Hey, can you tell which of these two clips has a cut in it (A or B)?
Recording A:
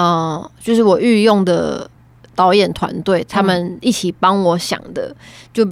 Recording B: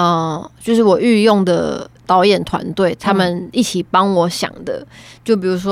B